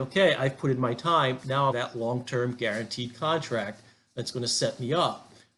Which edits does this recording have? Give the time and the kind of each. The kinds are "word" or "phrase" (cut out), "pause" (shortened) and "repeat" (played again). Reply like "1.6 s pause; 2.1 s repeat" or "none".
1.7 s phrase